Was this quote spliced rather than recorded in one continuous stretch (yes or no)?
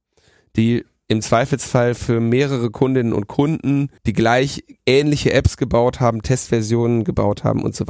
yes